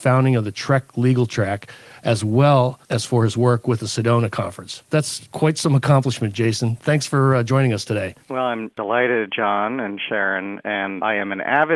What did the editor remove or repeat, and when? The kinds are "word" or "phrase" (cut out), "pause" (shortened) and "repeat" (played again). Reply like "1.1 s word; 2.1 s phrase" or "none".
2.8 s pause; 4.9 s pause; 8.2 s pause